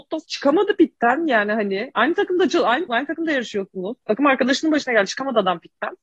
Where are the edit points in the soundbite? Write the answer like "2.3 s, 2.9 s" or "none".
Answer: 2.9 s